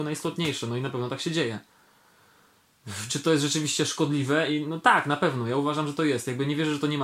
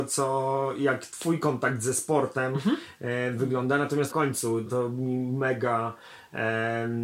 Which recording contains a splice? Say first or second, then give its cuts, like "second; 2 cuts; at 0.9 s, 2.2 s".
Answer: second; 2 cuts; at 4.1 s, 4.7 s